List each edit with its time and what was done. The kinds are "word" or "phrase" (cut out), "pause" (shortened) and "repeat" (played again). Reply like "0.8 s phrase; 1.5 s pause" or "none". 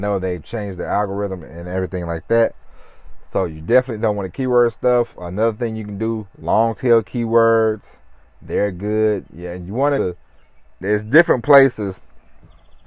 10.0 s phrase